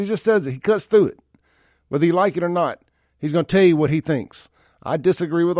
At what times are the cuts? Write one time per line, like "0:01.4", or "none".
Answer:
none